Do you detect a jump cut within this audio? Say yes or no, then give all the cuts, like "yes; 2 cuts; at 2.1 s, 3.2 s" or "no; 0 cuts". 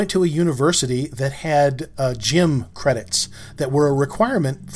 no; 0 cuts